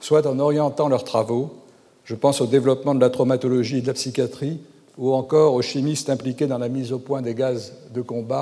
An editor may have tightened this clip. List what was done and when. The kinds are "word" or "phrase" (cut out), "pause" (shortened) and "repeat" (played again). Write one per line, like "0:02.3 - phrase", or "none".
none